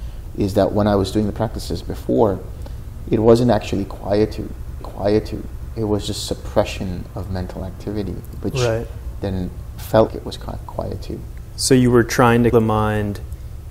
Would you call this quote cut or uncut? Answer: cut